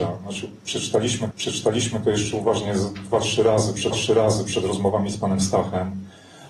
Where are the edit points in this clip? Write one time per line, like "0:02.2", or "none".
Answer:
0:01.3
0:03.9